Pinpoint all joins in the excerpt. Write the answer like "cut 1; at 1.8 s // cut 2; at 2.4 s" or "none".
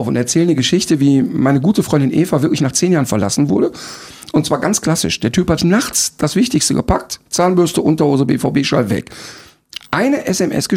cut 1; at 5.6 s